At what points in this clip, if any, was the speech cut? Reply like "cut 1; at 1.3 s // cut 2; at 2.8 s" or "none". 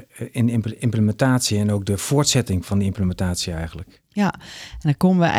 none